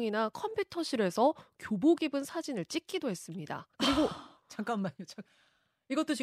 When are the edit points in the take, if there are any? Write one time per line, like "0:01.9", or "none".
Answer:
0:03.7